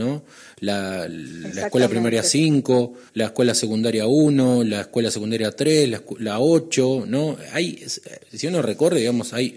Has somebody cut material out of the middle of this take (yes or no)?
yes